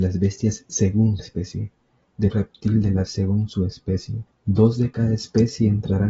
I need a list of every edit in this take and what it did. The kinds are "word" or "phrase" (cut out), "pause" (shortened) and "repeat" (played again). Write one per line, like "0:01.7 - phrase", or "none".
0:01.2 - word
0:02.3 - word
0:03.1 - word
0:04.3 - pause